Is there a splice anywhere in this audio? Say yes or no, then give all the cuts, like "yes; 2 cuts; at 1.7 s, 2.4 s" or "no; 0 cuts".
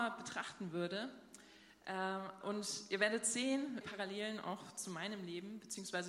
yes; 2 cuts; at 2.4 s, 3.8 s